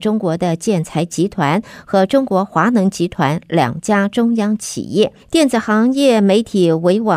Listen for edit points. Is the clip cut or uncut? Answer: cut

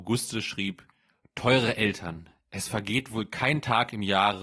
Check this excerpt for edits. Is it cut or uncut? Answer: uncut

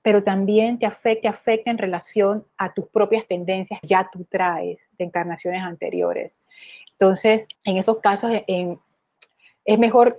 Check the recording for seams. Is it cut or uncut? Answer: cut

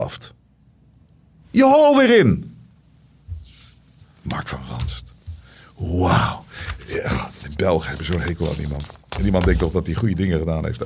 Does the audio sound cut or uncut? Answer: uncut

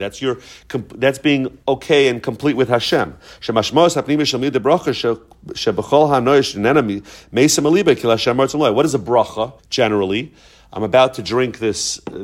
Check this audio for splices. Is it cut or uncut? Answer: cut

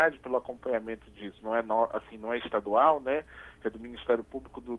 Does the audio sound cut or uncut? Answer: uncut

